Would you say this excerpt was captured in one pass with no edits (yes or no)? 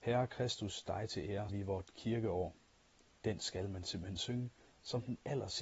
no